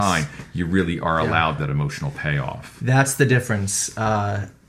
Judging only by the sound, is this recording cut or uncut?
cut